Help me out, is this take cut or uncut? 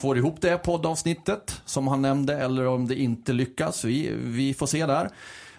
uncut